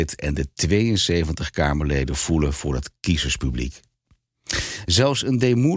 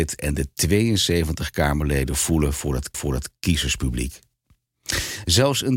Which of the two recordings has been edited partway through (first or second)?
second